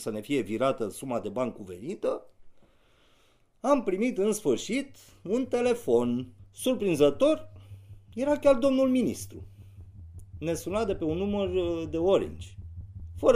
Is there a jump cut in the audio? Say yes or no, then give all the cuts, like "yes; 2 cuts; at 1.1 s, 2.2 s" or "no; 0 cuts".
no; 0 cuts